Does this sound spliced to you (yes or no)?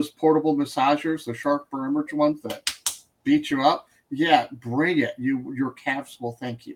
no